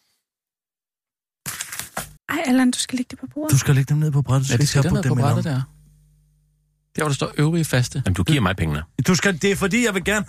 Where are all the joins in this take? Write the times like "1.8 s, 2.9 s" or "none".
2.2 s